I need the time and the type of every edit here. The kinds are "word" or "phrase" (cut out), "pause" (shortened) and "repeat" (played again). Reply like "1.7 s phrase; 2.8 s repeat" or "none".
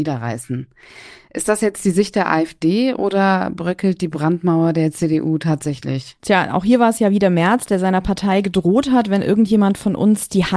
6.2 s pause